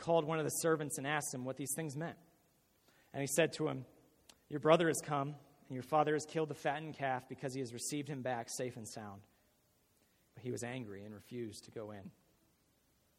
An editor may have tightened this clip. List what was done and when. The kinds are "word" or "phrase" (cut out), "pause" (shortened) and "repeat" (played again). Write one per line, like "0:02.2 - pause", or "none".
none

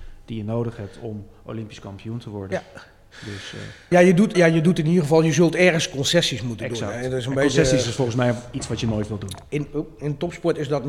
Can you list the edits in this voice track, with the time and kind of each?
0:03.9 - word
0:04.3 - word

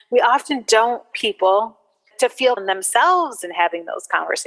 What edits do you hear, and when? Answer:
0:01.1 - word
0:02.1 - word
0:02.6 - word

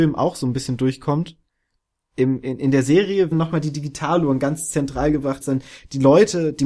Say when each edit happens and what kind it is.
0:03.3 - word
0:05.4 - word

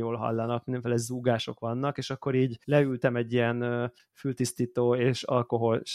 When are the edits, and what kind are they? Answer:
0:02.6 - pause

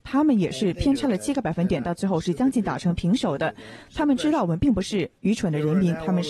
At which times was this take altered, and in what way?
0:05.2 - pause

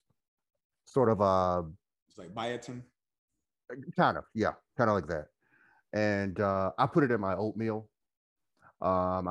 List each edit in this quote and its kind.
none

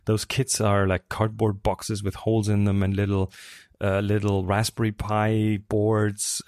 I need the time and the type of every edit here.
none

